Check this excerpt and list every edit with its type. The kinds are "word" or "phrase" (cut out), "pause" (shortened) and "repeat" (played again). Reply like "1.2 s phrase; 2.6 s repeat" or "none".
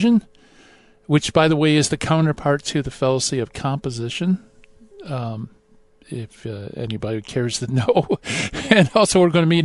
none